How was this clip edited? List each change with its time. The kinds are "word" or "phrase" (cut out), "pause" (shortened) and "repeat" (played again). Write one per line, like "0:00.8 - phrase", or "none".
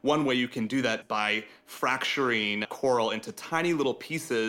0:01.0 - word
0:02.6 - word

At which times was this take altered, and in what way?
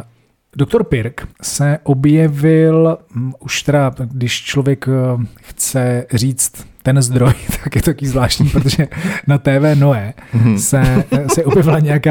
0:01.3 - pause
0:03.0 - pause

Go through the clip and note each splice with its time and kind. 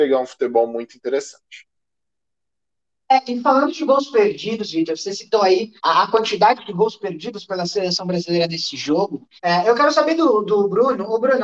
0:05.8 - pause
0:09.4 - pause

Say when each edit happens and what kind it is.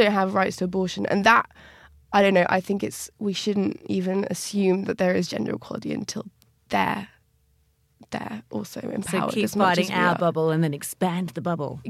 none

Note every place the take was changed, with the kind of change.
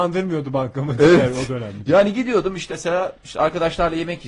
0:02.7 - word

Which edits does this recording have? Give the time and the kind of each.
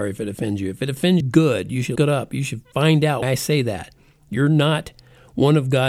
0:01.2 - word
0:02.0 - word
0:03.2 - word

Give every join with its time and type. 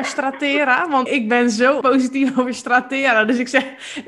0:01.1 - word
0:01.8 - word

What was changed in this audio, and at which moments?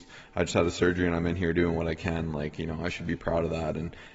none

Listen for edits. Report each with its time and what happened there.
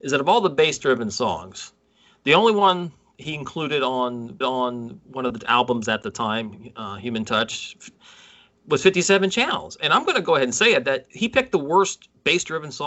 0:04.4 - repeat

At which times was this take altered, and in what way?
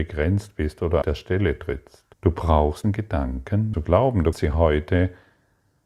0:01.0 - word
0:02.1 - pause
0:02.8 - word
0:03.7 - phrase
0:04.3 - word

